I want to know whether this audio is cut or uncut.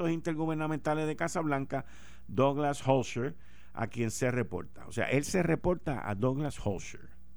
uncut